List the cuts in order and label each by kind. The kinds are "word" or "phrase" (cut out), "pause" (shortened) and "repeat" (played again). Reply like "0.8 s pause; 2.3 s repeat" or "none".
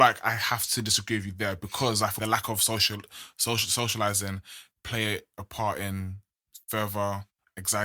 2.2 s word; 4.7 s word